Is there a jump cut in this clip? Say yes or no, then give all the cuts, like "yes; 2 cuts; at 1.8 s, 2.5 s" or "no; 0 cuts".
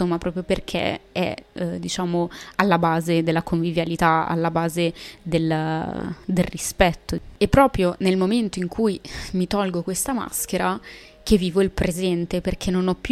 no; 0 cuts